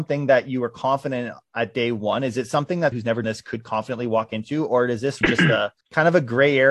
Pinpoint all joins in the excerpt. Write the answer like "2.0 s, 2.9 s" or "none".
2.9 s, 3.2 s, 5.2 s, 5.8 s